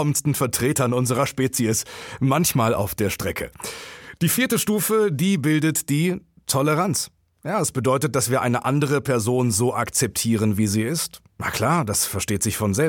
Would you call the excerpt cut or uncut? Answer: uncut